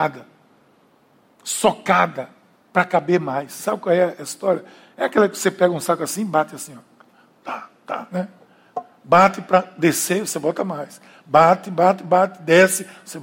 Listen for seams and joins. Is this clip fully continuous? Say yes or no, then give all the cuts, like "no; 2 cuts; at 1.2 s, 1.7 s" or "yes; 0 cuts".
yes; 0 cuts